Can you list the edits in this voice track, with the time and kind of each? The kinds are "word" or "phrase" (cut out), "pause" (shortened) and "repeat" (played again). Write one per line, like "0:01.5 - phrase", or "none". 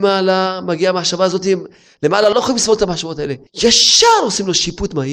0:03.5 - pause